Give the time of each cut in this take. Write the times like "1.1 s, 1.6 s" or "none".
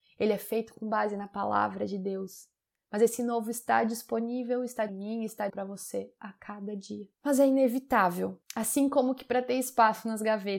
4.9 s, 5.5 s, 7.1 s, 8.4 s